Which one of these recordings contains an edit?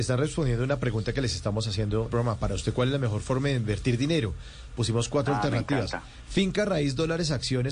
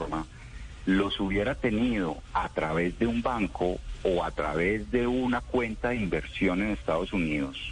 first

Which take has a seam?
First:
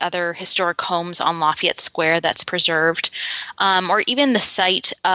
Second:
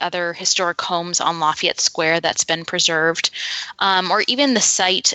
first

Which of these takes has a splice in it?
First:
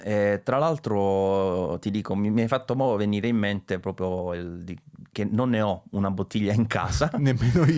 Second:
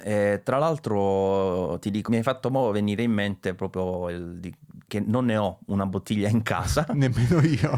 second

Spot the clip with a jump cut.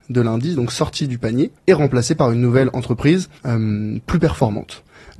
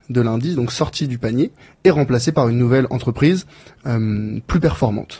first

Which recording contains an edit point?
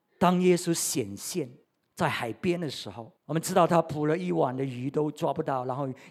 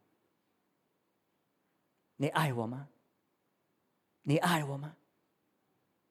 first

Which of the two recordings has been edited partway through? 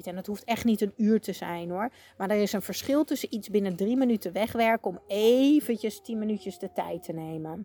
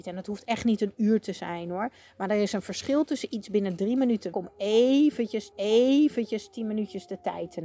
second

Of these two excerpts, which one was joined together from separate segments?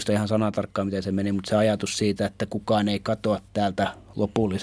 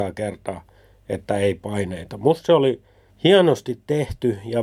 second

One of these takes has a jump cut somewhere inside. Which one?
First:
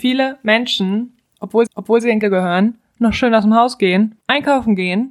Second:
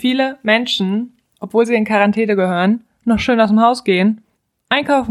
first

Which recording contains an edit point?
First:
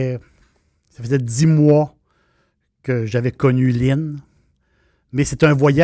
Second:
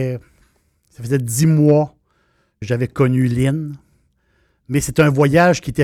second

